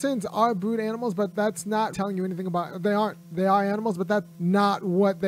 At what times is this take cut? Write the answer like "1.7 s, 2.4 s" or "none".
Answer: 1.9 s, 3.2 s, 4.3 s